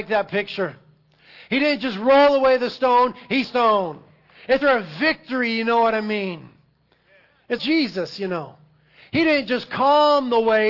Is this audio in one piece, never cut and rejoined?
no; 3 cuts; at 3.4 s, 4.6 s, 7.6 s

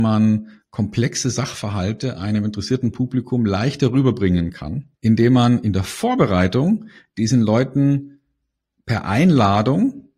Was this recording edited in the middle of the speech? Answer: yes; 1 cut; at 4.9 s

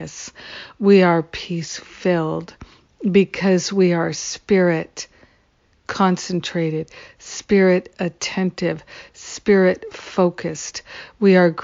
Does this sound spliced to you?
no; 0 cuts

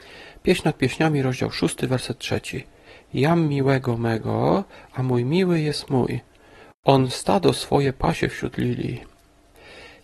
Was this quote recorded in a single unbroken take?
yes; 0 cuts

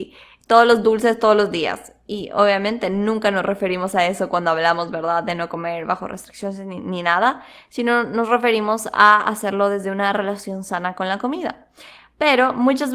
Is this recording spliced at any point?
no; 0 cuts

